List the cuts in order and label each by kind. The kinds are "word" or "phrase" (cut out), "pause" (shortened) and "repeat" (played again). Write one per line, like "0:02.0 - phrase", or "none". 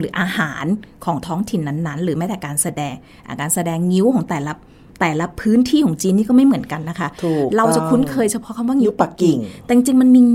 none